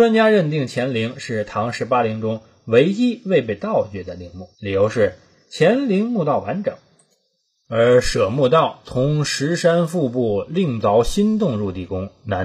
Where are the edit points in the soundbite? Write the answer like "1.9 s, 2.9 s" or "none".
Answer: 4.5 s